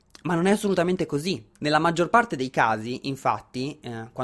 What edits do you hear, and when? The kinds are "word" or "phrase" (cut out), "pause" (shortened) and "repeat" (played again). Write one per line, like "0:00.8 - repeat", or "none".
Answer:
0:01.6 - pause